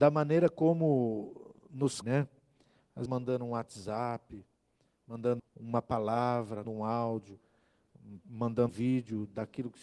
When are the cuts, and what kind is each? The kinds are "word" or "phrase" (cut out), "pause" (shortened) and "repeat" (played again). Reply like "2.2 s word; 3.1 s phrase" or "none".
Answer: 2.0 s word; 3.1 s word; 5.4 s word; 6.6 s word; 8.7 s word